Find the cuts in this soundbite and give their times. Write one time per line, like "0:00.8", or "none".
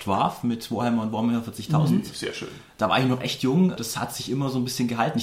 none